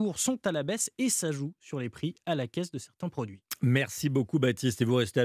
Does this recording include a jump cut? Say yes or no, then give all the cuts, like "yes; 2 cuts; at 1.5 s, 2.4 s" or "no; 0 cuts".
no; 0 cuts